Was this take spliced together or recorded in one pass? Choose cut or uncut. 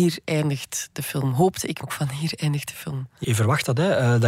cut